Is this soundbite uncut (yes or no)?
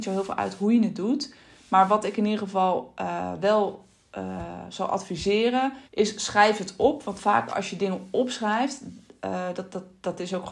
no